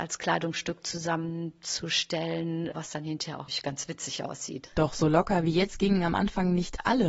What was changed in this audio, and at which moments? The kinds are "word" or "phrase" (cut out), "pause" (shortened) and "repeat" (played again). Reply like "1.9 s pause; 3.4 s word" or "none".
3.5 s word

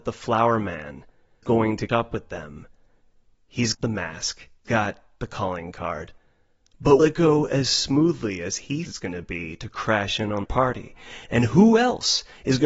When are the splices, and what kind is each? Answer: 1.4 s word; 1.9 s word; 3.7 s word; 4.7 s word; 7.0 s word; 8.9 s word; 10.4 s word

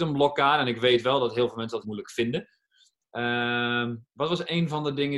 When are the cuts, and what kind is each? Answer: 1.8 s word

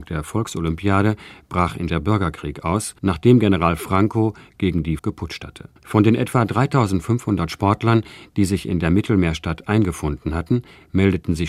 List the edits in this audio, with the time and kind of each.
1.9 s word; 3.0 s pause; 5.0 s word; 5.8 s pause

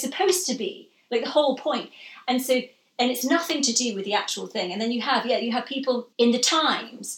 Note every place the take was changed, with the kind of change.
6.1 s pause

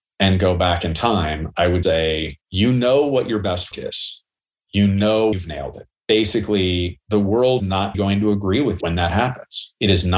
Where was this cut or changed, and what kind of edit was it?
1.8 s word; 2.4 s pause; 3.7 s word; 5.3 s word; 5.9 s pause; 7.6 s word; 7.9 s word; 8.8 s word

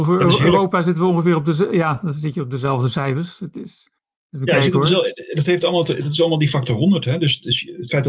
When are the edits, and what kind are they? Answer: 4.0 s pause

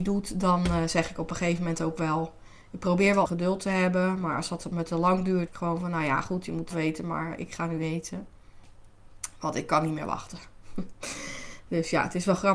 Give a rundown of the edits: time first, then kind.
2.6 s pause; 3.3 s word; 5.5 s phrase; 6.7 s word

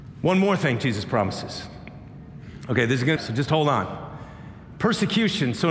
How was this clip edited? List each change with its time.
3.2 s phrase

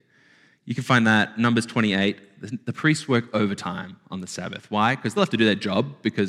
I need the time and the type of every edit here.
5.2 s word

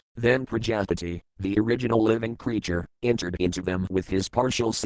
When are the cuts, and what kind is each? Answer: none

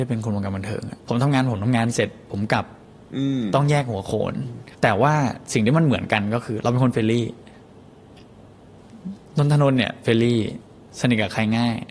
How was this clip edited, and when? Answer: 1.0 s pause; 4.7 s pause; 9.3 s pause

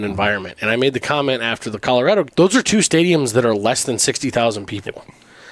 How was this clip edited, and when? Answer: 2.3 s word

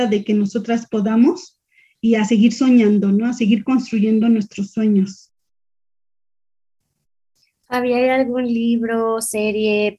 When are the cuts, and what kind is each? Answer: none

